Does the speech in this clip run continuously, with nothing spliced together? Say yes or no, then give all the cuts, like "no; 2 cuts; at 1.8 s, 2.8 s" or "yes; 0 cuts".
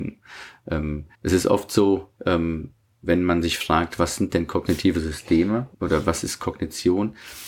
no; 3 cuts; at 1.1 s, 2.2 s, 5.7 s